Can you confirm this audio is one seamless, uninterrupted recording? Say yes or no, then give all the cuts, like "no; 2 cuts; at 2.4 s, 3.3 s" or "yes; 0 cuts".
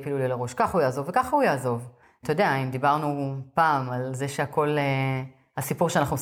yes; 0 cuts